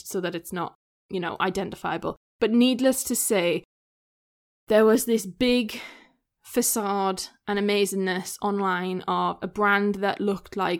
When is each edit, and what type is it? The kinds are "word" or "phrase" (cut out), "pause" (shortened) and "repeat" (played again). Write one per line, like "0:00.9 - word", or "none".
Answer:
none